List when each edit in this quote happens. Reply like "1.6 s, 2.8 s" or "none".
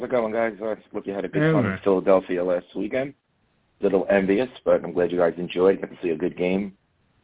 1.0 s, 3.8 s